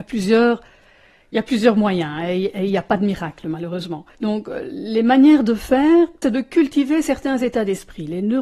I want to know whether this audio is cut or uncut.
cut